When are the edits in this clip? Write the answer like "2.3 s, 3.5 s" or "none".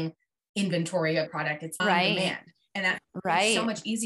1.3 s, 1.8 s